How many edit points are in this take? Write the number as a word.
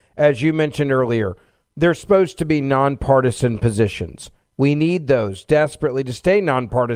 zero